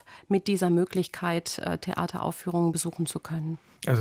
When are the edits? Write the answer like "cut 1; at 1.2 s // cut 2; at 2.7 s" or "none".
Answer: none